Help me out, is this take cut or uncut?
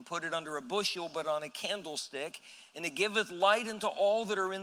uncut